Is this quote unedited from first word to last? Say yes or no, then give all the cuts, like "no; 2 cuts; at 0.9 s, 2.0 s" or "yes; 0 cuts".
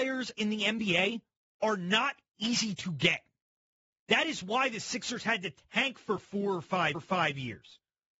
no; 1 cut; at 6.9 s